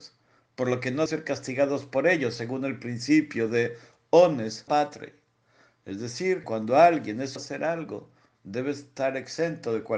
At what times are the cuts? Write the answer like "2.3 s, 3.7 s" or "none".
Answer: 1.1 s, 4.7 s, 6.4 s, 7.4 s